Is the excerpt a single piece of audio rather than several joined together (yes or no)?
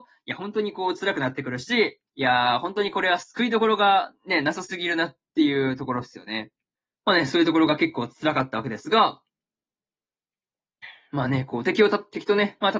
no